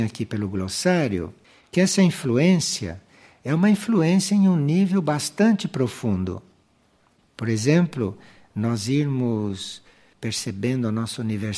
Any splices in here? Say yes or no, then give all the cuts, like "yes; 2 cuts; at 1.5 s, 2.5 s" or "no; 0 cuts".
no; 0 cuts